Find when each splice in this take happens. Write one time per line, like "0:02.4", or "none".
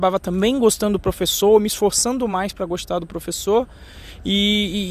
none